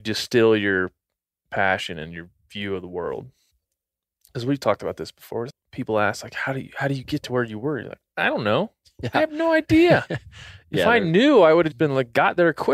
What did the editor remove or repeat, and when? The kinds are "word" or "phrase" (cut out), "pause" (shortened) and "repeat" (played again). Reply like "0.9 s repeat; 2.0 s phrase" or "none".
5.5 s word; 11.7 s word